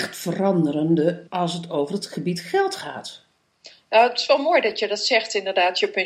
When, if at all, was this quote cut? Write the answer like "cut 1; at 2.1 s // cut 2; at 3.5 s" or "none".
cut 1; at 1.3 s